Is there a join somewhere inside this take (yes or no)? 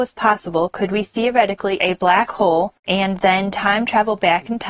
yes